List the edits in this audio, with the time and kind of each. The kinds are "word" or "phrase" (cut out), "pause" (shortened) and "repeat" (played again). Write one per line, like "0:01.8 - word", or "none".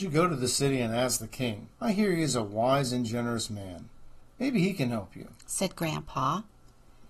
0:01.7 - pause